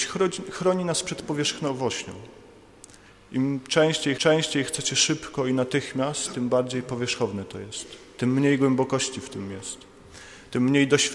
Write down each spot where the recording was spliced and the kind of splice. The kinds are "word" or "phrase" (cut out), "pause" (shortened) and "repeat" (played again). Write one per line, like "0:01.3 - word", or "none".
0:04.2 - repeat